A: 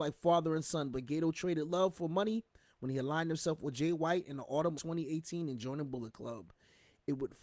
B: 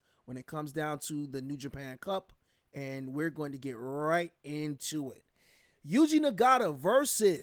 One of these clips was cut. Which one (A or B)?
A